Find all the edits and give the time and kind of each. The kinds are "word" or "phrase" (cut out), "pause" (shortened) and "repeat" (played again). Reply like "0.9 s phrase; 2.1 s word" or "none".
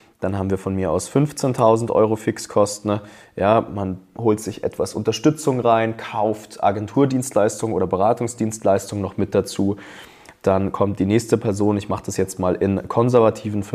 none